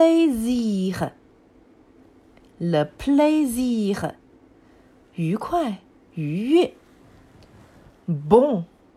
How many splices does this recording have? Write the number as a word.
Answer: zero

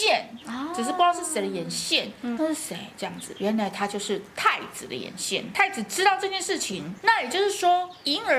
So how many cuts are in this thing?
one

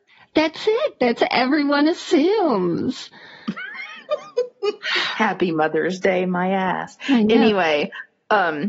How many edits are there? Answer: zero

